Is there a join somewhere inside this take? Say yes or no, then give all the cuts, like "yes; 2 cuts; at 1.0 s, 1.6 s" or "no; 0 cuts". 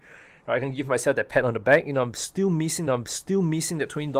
yes; 1 cut; at 2.9 s